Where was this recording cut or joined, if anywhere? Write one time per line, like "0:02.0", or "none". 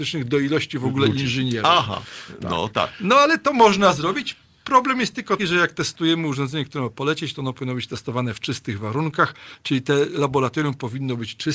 0:05.4